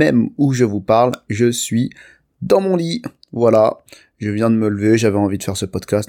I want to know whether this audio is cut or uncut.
uncut